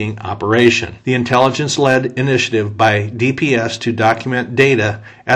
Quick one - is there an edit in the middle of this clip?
no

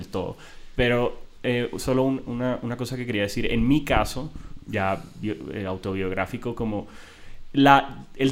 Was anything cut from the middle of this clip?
no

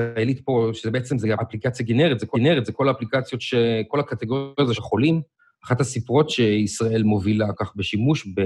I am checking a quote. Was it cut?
yes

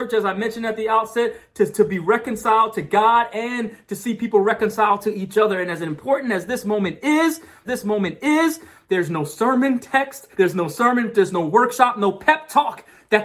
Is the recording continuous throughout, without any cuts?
no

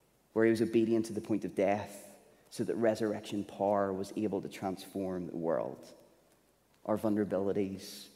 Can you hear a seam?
no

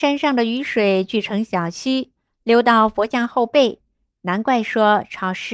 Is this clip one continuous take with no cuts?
yes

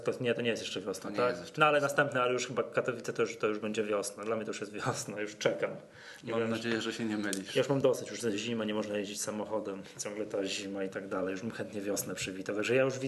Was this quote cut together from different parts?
no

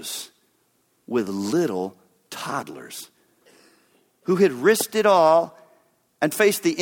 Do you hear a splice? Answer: no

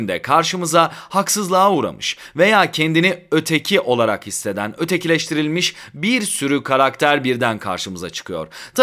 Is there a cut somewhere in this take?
no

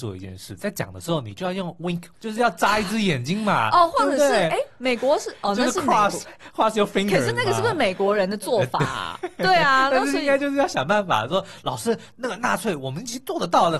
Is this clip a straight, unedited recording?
no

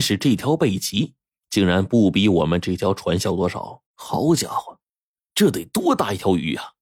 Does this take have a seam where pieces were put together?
yes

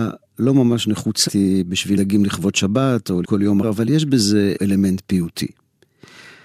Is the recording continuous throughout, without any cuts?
no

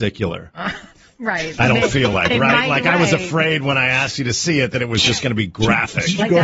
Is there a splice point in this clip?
no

